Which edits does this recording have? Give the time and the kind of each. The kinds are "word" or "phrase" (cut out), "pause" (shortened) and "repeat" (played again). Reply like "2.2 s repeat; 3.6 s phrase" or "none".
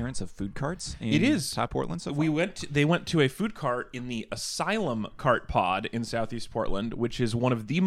1.7 s word